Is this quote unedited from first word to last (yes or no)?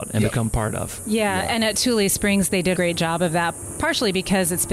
no